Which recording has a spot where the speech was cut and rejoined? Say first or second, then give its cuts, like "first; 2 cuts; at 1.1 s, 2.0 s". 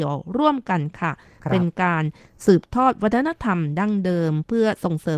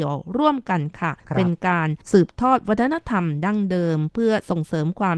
second; 2 cuts; at 1.2 s, 2.0 s